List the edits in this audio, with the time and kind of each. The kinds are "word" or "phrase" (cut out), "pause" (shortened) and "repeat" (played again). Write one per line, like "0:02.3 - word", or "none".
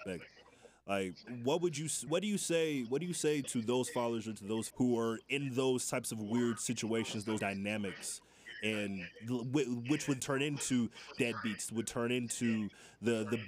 0:01.3 - word
0:02.1 - word
0:03.4 - word
0:04.7 - word
0:07.4 - word
0:10.2 - word
0:11.2 - word